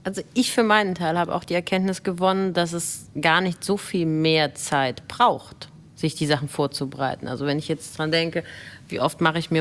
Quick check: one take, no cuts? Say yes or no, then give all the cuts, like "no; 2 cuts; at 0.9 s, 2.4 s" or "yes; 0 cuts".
yes; 0 cuts